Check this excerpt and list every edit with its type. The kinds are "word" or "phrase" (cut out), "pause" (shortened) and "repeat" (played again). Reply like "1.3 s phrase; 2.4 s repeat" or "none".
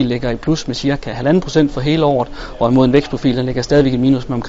none